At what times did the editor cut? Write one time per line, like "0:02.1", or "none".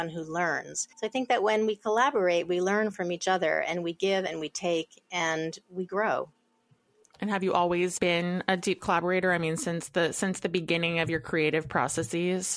0:00.9